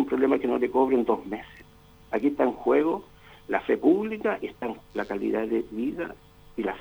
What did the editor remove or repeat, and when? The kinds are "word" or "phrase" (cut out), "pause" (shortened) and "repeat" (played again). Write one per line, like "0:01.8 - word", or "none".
0:04.8 - word